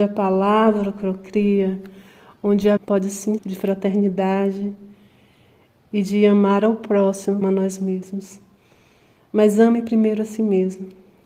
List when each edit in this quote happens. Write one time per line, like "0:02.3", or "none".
0:02.8
0:03.4
0:07.4